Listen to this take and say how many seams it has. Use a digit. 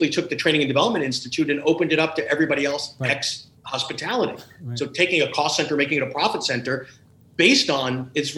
0